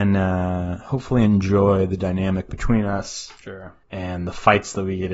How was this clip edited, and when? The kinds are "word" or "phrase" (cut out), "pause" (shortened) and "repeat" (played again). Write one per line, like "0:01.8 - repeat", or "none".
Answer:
0:03.8 - pause